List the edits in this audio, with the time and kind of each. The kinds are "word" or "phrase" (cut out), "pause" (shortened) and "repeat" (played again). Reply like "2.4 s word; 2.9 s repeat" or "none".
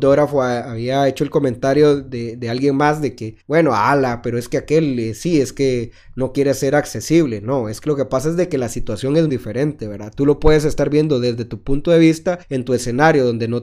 3.4 s pause; 9.3 s word; 12.4 s pause